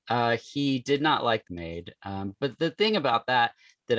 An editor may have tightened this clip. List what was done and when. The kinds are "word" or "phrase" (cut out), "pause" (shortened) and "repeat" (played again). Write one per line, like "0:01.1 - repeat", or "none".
0:01.5 - phrase

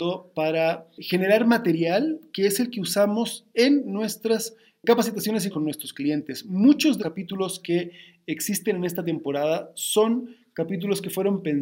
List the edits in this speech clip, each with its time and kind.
0:05.5 - word
0:07.0 - word

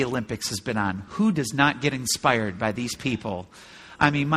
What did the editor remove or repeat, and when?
none

